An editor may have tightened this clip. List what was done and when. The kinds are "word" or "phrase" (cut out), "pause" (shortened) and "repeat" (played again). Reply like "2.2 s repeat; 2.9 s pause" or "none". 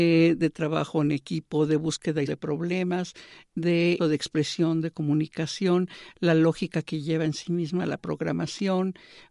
2.3 s word; 4.0 s word